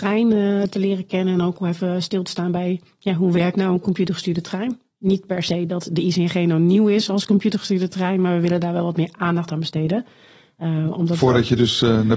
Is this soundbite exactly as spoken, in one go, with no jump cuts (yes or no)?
yes